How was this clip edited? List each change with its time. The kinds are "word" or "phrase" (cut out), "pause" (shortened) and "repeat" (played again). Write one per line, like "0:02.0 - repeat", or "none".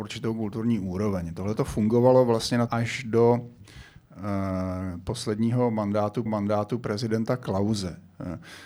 0:02.7 - phrase
0:06.3 - repeat